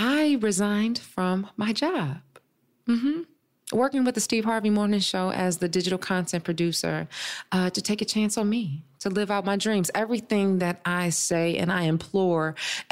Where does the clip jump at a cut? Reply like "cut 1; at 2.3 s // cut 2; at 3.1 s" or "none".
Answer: none